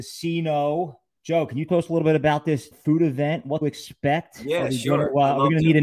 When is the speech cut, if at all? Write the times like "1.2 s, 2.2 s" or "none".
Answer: 1.2 s, 1.7 s, 2.7 s, 3.6 s